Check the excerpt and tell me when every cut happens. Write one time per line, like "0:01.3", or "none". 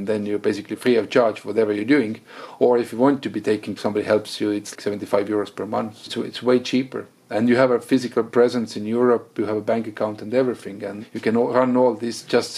0:03.8
0:04.7
0:08.3